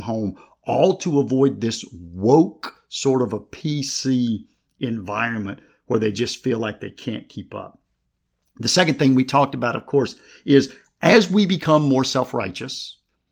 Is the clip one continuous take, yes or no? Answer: yes